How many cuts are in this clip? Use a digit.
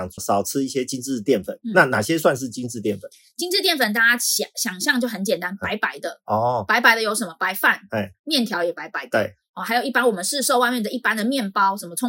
0